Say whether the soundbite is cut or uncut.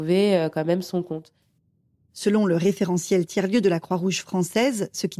uncut